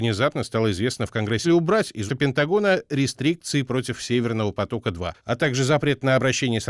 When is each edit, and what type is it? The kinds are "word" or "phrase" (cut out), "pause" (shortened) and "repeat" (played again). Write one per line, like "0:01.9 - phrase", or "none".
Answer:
0:01.4 - phrase
0:02.1 - phrase